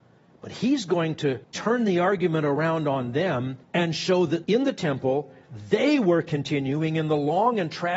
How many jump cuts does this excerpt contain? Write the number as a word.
three